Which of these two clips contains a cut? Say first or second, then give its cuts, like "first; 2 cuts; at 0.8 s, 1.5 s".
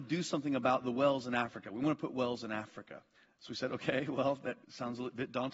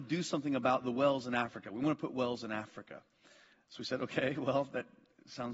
first; 2 cuts; at 3.1 s, 4.6 s